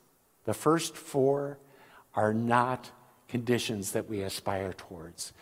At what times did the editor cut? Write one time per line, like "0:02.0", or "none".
none